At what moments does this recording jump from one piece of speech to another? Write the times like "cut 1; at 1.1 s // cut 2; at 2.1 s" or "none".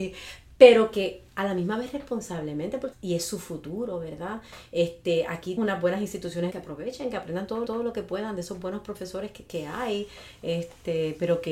cut 1; at 2.9 s // cut 2; at 5.6 s // cut 3; at 6.5 s // cut 4; at 7.6 s // cut 5; at 9.4 s